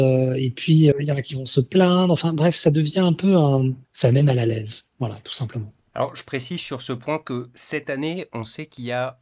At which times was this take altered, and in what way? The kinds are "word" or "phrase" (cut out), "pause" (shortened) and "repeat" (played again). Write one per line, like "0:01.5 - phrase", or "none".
0:00.9 - word
0:03.8 - pause